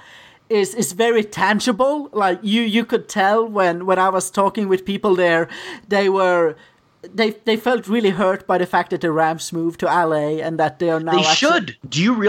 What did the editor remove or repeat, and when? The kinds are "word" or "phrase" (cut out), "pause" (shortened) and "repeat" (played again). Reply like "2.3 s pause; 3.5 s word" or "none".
none